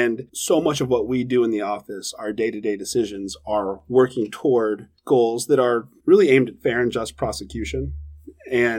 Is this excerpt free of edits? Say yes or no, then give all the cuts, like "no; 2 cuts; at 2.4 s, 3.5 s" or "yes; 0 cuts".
yes; 0 cuts